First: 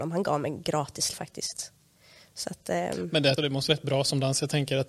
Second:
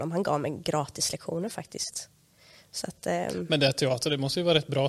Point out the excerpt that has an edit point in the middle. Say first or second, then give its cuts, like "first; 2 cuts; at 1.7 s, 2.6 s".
first; 3 cuts; at 1.1 s, 3.4 s, 3.7 s